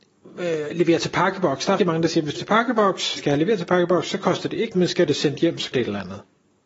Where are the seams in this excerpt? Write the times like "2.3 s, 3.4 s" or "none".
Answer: 1.8 s, 2.4 s, 3.2 s, 4.7 s, 5.1 s, 5.7 s